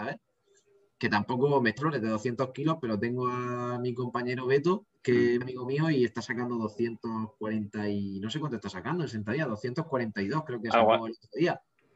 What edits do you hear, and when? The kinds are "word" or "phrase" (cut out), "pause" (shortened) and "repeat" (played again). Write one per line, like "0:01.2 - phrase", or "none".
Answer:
0:01.8 - phrase
0:05.0 - pause
0:05.4 - word